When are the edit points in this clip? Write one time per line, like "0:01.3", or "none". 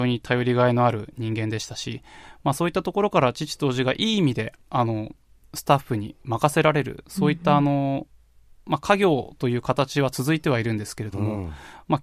0:04.6